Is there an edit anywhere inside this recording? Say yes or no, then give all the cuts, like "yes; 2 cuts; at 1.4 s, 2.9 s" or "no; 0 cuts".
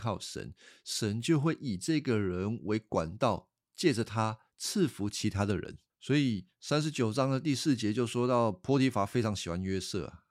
yes; 1 cut; at 5.9 s